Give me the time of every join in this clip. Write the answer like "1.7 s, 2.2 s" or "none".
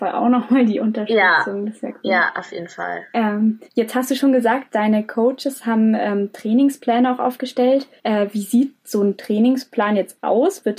3.7 s, 8.0 s

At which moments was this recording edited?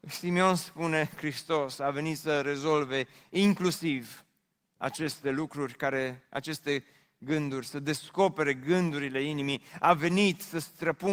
none

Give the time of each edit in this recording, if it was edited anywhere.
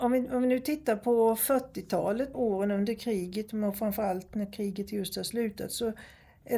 2.3 s

